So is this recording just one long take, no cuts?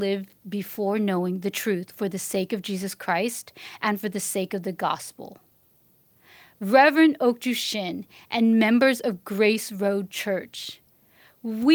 yes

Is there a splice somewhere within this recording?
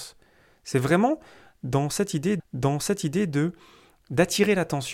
yes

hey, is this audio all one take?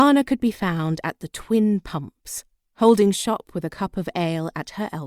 yes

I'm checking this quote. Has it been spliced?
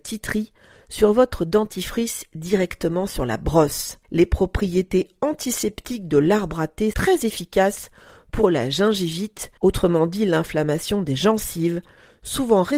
yes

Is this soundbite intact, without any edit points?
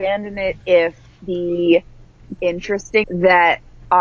no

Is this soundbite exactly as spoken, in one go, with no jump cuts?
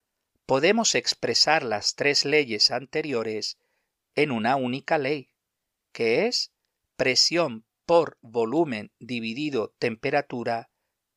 yes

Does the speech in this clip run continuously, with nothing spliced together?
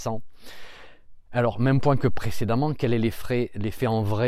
yes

